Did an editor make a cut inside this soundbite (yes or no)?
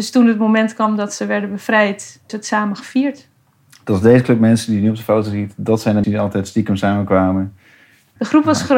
yes